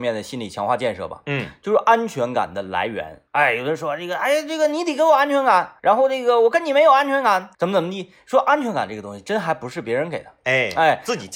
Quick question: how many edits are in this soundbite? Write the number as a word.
three